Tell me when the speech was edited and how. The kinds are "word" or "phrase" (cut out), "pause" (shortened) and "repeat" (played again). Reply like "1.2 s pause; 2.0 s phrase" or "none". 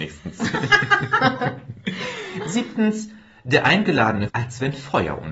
4.3 s word